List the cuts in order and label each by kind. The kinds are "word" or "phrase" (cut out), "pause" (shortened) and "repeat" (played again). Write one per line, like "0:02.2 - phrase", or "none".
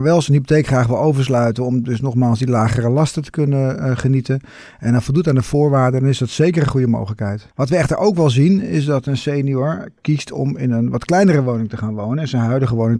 0:07.5 - pause